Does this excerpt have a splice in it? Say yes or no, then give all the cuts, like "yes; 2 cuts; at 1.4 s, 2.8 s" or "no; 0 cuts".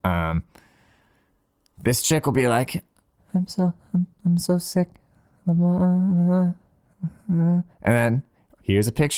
no; 0 cuts